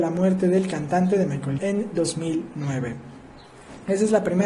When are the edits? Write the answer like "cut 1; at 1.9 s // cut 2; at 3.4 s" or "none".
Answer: cut 1; at 1.6 s

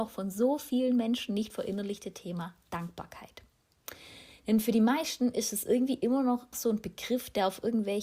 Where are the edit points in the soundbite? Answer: cut 1; at 6.5 s

